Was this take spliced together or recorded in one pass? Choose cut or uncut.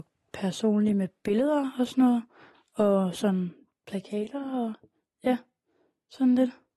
uncut